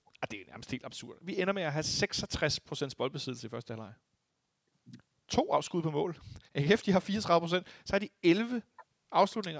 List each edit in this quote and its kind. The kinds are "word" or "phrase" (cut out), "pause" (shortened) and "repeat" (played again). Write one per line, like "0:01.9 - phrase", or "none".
0:06.5 - pause